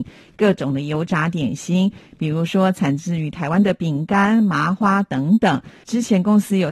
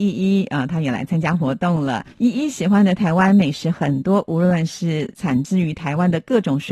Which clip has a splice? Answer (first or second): second